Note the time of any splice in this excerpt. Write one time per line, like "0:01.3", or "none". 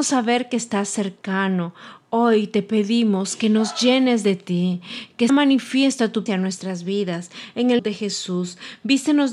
0:05.3
0:06.3
0:07.8